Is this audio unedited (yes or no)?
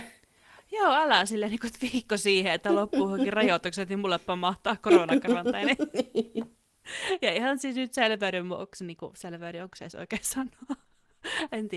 yes